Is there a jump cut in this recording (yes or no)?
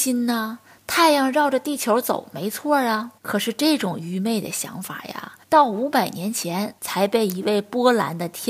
yes